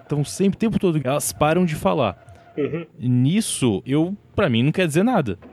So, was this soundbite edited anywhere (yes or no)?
yes